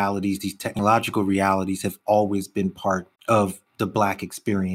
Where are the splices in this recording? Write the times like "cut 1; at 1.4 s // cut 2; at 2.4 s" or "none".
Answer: cut 1; at 3.1 s

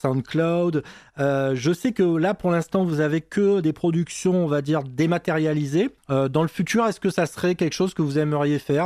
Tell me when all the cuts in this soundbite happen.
cut 1; at 6.0 s

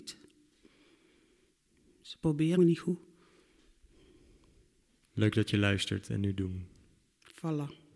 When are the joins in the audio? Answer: cut 1; at 2.6 s

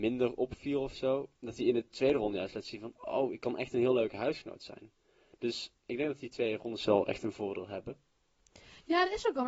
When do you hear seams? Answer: cut 1; at 5.7 s

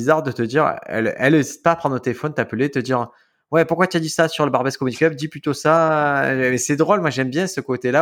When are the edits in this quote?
none

